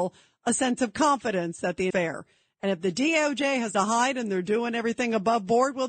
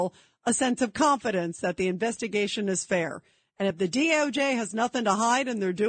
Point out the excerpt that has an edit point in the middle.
first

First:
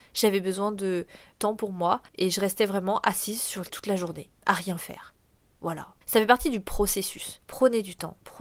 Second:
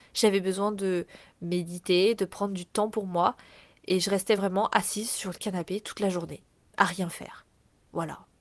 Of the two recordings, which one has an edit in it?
first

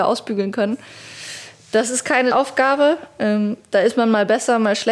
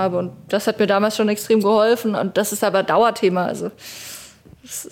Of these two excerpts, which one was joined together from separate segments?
first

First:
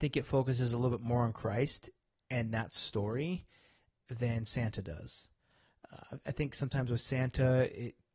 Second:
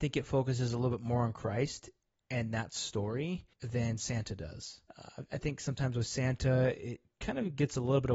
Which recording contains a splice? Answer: second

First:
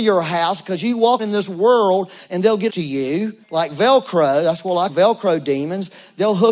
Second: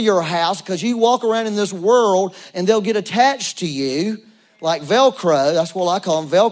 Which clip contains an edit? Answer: first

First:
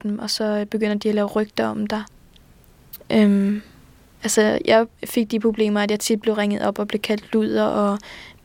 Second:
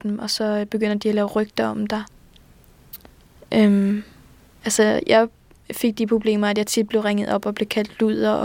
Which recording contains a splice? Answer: first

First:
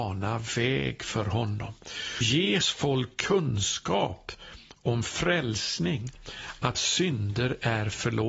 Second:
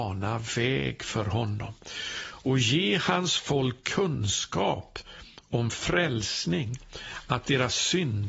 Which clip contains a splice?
first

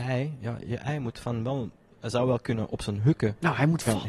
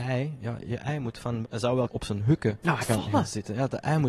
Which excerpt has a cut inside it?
second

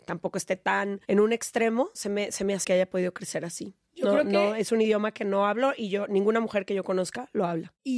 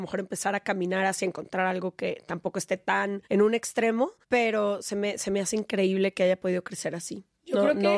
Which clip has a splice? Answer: first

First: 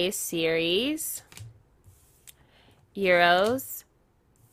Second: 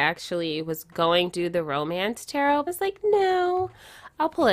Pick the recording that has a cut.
second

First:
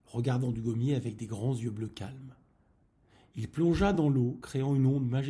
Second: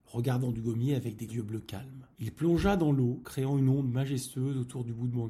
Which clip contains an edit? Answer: second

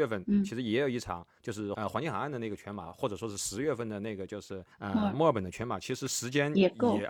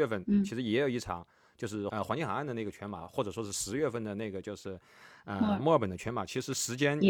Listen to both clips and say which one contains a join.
first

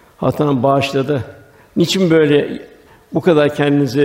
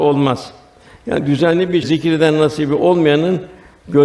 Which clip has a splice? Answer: second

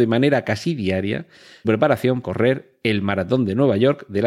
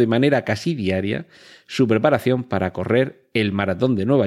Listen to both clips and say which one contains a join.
first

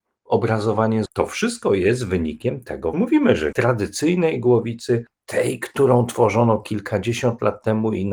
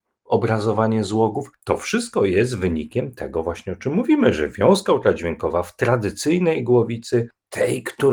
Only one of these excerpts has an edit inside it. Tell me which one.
first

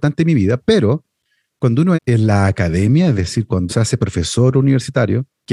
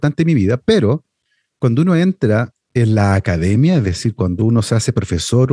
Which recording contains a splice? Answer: first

